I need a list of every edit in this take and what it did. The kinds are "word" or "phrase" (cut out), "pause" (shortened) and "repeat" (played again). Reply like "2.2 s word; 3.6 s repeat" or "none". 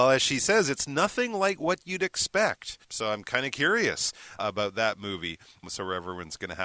2.8 s pause